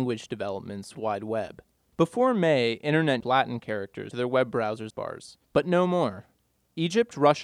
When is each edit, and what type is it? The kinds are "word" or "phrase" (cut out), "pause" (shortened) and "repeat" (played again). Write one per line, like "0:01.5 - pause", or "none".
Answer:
0:00.9 - phrase
0:01.8 - pause
0:03.2 - phrase
0:04.1 - word
0:04.9 - word
0:05.4 - pause